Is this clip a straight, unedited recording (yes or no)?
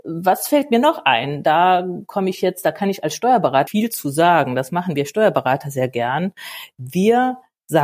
no